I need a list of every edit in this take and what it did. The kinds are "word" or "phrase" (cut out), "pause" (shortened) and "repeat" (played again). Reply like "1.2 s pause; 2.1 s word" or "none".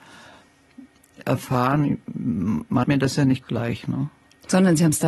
1.2 s word; 2.8 s word; 3.4 s word

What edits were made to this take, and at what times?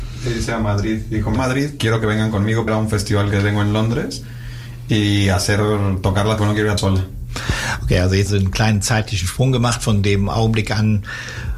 1.4 s word; 1.8 s word; 2.7 s word; 6.4 s word; 6.8 s word; 8.3 s word

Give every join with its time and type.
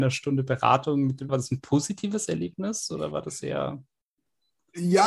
1.3 s word

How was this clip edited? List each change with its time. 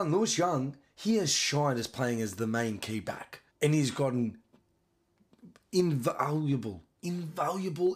3.5 s pause

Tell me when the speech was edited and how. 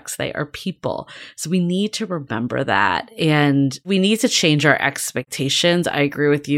none

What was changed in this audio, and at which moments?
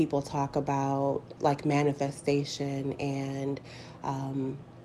1.4 s word

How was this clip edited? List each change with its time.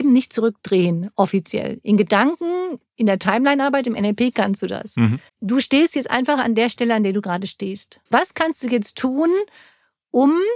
5.3 s pause; 8.1 s pause

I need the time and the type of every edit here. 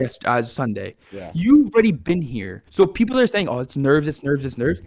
2.7 s pause

